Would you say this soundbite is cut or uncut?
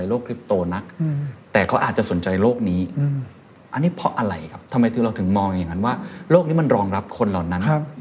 uncut